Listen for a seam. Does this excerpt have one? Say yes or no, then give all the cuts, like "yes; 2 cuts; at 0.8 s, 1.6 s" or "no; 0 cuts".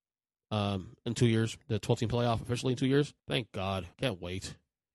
yes; 3 cuts; at 1.6 s, 3.2 s, 3.9 s